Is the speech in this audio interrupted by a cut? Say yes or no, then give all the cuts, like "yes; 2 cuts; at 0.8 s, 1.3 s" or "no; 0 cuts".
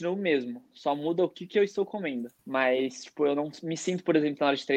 yes; 1 cut; at 2.4 s